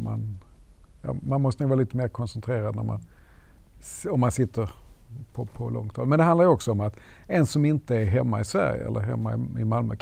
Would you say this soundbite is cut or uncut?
uncut